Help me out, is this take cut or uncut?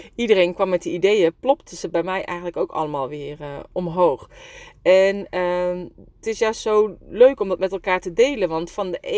uncut